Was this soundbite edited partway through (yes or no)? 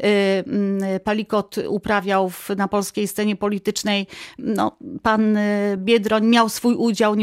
no